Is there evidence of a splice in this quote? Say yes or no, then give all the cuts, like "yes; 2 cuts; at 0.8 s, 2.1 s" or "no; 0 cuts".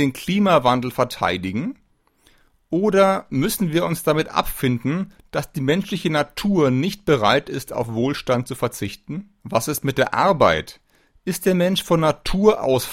yes; 1 cut; at 9.4 s